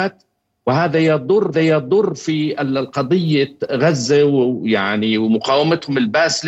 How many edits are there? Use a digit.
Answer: 1